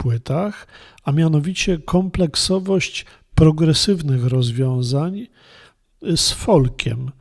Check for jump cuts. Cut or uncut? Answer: cut